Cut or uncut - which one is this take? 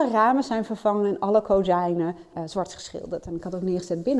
cut